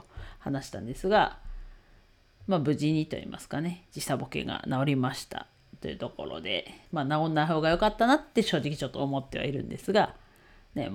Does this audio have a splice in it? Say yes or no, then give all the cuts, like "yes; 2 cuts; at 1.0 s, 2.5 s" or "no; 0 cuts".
yes; 1 cut; at 6.9 s